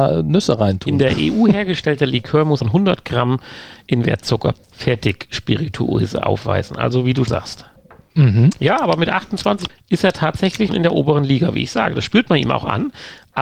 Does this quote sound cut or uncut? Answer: cut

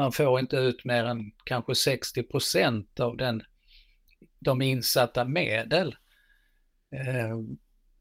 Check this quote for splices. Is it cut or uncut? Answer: uncut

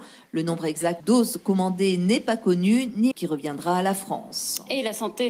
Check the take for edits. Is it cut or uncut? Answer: cut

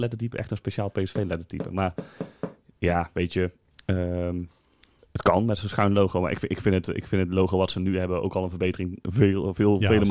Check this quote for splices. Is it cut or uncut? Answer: uncut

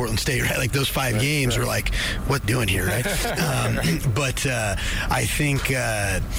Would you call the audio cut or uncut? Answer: cut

